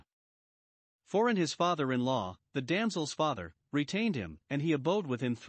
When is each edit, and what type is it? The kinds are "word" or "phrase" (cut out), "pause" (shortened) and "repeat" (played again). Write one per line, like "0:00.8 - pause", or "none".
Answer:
0:04.4 - pause